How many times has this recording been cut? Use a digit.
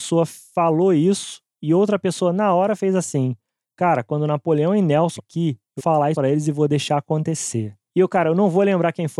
3